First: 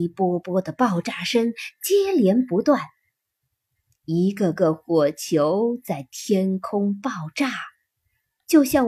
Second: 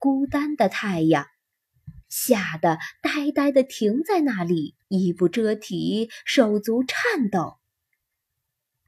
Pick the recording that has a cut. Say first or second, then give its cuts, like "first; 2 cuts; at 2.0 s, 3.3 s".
second; 2 cuts; at 2.0 s, 4.8 s